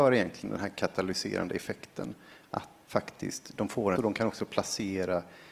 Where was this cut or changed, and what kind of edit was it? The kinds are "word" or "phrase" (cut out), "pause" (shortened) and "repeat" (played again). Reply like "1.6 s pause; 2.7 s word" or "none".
2.8 s word; 4.0 s phrase